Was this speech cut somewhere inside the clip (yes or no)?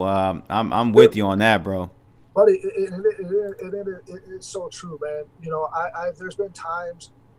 no